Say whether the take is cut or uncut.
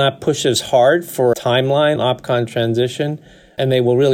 cut